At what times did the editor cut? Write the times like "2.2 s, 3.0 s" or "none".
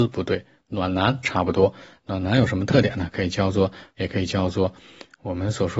4.0 s